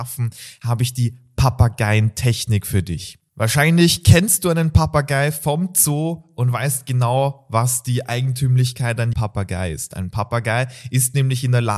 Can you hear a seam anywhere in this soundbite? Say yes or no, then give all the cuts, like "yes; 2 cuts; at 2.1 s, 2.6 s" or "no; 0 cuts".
yes; 1 cut; at 9.1 s